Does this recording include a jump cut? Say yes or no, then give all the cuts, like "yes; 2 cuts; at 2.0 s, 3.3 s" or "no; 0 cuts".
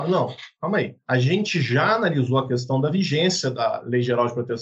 no; 0 cuts